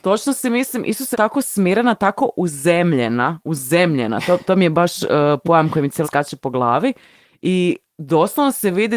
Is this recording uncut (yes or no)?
no